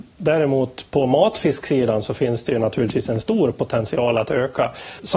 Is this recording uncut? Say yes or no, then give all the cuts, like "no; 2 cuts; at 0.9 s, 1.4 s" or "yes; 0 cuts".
yes; 0 cuts